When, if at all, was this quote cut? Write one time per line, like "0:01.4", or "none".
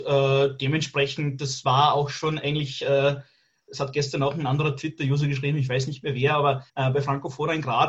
0:06.7